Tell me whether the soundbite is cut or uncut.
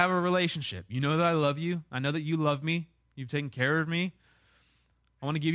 uncut